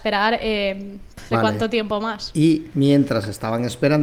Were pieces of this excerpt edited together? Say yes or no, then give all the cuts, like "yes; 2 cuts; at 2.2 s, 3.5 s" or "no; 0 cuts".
yes; 1 cut; at 1.3 s